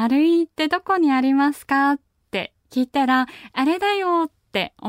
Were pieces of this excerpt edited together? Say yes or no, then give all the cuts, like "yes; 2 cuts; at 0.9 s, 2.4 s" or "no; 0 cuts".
no; 0 cuts